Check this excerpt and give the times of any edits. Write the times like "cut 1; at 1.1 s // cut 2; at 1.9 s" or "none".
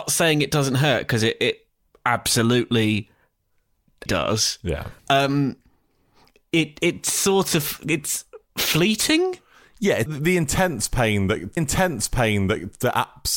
cut 1; at 4.1 s // cut 2; at 5.0 s // cut 3; at 10.1 s // cut 4; at 11.6 s